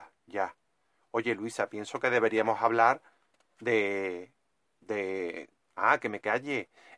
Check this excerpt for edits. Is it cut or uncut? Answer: uncut